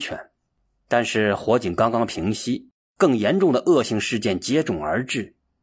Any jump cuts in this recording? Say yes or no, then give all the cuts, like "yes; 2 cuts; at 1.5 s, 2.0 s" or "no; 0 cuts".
no; 0 cuts